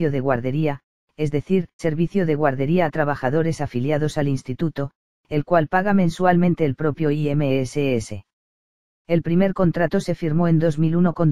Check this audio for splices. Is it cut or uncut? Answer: cut